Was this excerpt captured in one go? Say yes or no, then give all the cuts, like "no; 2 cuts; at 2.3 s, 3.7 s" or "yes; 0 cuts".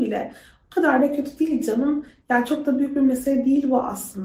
yes; 0 cuts